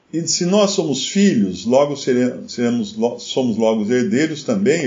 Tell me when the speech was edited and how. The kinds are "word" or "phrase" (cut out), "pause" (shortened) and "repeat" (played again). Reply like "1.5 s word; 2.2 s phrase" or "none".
none